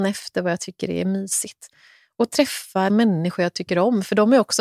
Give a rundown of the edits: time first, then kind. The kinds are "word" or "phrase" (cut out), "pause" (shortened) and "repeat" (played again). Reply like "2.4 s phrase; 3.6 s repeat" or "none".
2.9 s word